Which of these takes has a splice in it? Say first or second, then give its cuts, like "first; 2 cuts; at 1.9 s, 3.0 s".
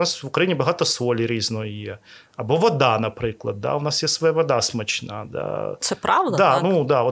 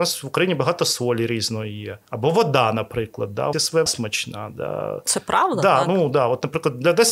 second; 3 cuts; at 2.0 s, 3.5 s, 3.9 s